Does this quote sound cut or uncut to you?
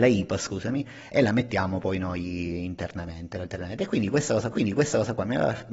cut